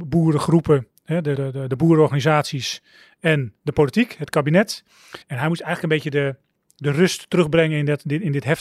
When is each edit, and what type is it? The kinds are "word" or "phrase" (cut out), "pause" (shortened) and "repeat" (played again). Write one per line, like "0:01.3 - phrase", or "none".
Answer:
0:01.4 - word
0:05.2 - pause